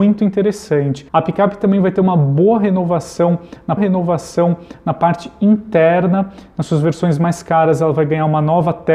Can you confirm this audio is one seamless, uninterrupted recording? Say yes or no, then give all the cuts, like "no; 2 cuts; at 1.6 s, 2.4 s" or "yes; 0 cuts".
no; 2 cuts; at 1.1 s, 3.8 s